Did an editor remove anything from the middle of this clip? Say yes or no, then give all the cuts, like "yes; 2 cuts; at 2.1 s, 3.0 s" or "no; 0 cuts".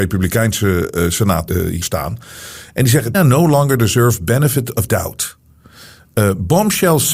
yes; 4 cuts; at 1.5 s, 1.8 s, 3.1 s, 4.9 s